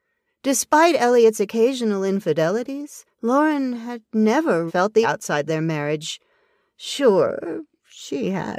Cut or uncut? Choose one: cut